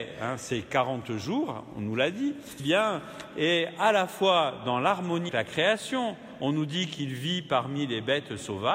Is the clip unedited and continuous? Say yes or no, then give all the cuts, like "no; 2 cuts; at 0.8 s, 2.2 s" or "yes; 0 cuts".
no; 2 cuts; at 2.6 s, 5.3 s